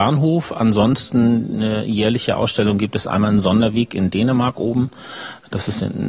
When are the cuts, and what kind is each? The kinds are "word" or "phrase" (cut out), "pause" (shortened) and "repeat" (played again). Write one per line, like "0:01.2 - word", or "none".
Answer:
none

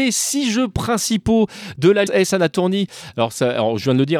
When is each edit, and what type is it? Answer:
0:02.1 - word

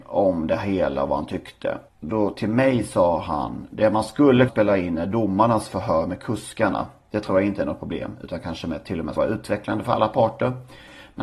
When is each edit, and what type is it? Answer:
0:01.9 - pause
0:04.5 - word
0:09.2 - word

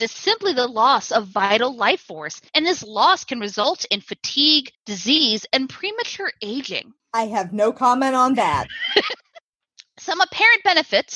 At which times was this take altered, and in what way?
0:02.5 - pause
0:04.7 - pause
0:07.0 - pause
0:09.2 - pause

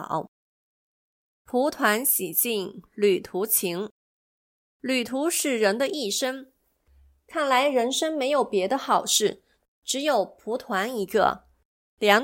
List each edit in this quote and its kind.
none

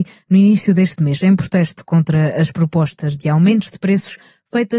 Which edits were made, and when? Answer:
none

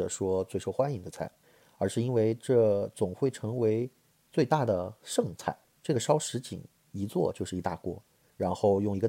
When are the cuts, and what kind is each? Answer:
none

